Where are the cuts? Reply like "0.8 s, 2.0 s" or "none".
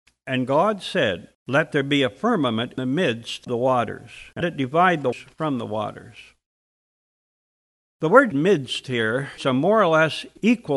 2.8 s, 3.5 s, 4.4 s, 5.1 s, 8.3 s, 9.4 s